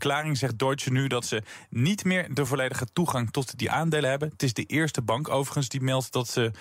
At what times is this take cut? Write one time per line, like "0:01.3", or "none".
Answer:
none